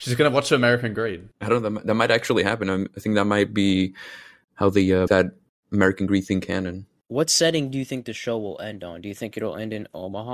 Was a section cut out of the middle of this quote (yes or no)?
yes